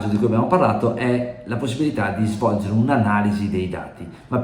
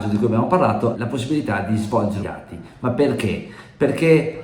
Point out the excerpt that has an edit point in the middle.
second; 2 cuts; at 0.9 s, 2.2 s

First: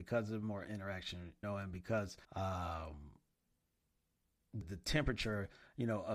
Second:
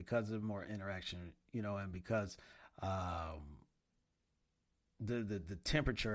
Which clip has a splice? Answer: first; 3 cuts; at 1.4 s, 2.2 s, 4.6 s

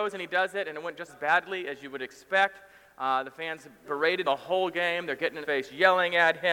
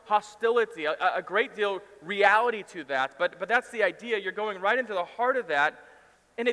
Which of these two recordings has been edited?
first; 4 cuts; at 1.1 s, 3.8 s, 4.2 s, 5.4 s

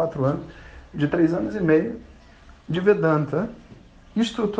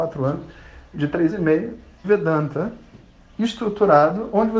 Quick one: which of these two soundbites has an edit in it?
second; 2 cuts; at 1.3 s, 2.0 s

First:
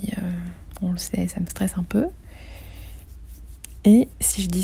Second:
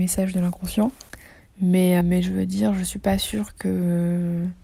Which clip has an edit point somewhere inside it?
second; 1 cut; at 2.0 s

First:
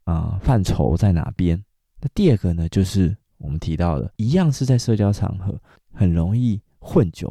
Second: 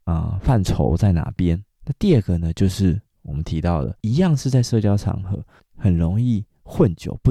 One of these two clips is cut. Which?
second; 1 cut; at 1.7 s

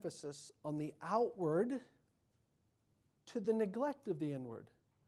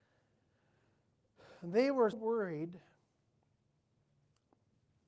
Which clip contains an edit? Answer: second; 2 cuts; at 1.6 s, 2.1 s

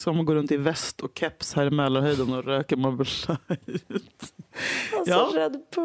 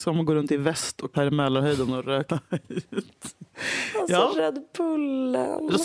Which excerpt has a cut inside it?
second; 2 cuts; at 1.1 s, 2.3 s

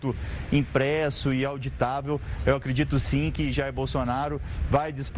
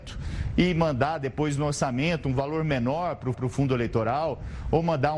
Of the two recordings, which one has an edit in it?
second; 1 cut; at 3.3 s

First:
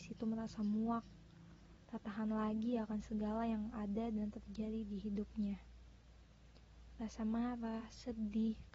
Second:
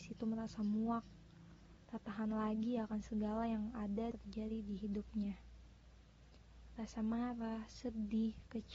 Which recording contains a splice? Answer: second; 1 cut; at 4.1 s

